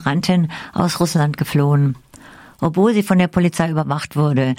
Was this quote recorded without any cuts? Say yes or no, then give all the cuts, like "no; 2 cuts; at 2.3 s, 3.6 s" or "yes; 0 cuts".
yes; 0 cuts